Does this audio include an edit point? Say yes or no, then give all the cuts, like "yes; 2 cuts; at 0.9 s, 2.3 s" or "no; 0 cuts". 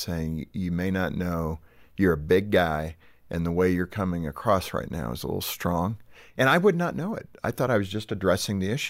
no; 0 cuts